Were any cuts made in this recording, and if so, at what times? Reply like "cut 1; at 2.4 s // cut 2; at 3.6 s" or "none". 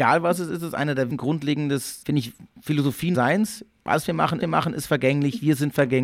cut 1; at 1.1 s // cut 2; at 2.0 s // cut 3; at 3.1 s // cut 4; at 4.4 s